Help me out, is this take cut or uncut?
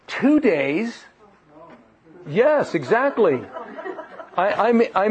uncut